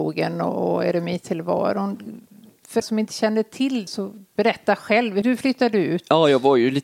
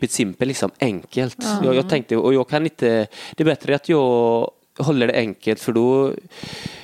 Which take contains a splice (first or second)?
first